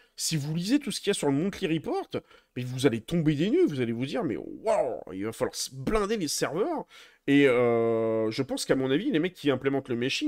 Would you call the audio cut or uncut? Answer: uncut